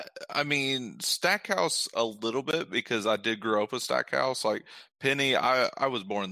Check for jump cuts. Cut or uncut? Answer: uncut